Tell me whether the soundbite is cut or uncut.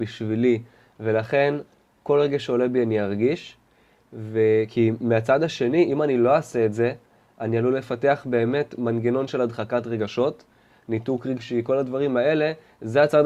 uncut